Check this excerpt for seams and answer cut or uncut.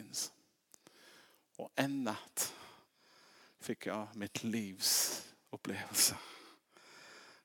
uncut